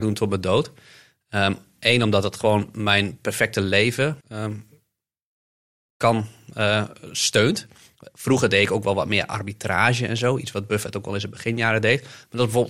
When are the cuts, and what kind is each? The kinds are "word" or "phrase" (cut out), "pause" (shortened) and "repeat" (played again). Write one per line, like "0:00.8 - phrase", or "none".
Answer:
0:04.2 - pause